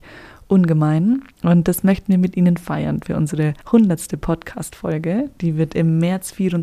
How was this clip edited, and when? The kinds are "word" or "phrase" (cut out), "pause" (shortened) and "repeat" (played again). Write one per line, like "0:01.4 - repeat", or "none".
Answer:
0:01.3 - pause
0:03.6 - pause